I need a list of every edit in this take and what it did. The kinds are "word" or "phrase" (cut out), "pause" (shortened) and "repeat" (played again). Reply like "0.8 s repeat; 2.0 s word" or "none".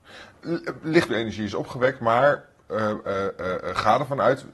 1.1 s phrase